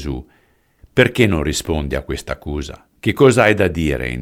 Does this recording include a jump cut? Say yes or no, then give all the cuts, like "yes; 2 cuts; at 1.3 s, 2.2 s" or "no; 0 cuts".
yes; 1 cut; at 3.0 s